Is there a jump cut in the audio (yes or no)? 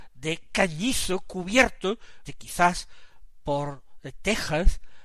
yes